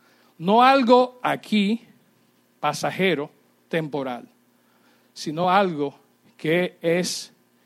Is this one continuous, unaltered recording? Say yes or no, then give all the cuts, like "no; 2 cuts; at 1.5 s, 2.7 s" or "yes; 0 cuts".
yes; 0 cuts